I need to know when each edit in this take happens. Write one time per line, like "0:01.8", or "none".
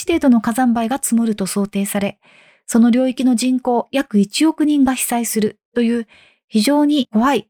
none